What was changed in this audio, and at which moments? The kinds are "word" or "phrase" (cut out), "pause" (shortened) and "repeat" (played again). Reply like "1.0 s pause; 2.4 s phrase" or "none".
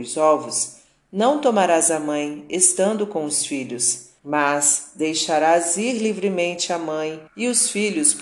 4.2 s pause; 7.3 s pause